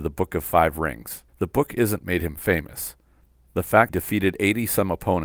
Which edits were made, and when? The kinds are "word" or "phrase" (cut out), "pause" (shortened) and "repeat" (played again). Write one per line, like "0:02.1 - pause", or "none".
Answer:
0:01.3 - pause
0:02.0 - word
0:03.9 - phrase